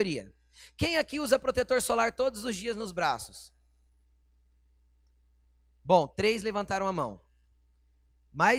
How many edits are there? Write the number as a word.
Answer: zero